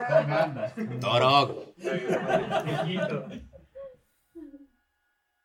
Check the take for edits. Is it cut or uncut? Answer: uncut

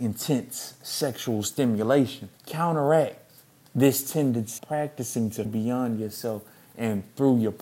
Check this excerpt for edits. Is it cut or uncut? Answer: cut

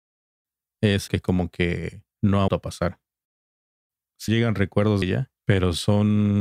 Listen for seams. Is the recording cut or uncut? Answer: cut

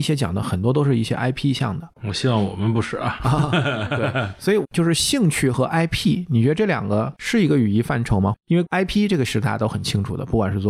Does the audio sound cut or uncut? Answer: cut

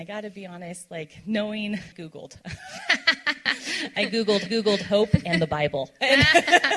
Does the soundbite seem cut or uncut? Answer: cut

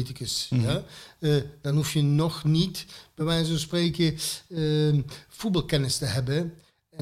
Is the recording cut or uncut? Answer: uncut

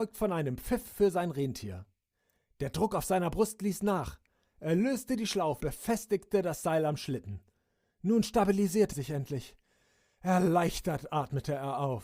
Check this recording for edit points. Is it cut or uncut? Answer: cut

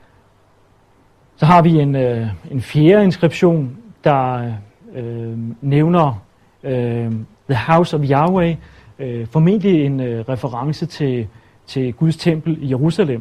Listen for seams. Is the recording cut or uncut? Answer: uncut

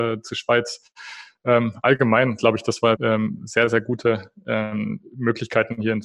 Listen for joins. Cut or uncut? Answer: cut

